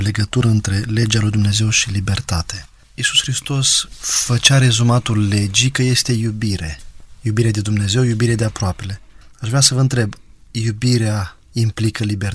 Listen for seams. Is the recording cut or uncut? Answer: uncut